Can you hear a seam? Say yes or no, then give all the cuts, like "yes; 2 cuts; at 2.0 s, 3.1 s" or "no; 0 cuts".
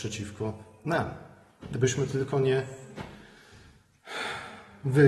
no; 0 cuts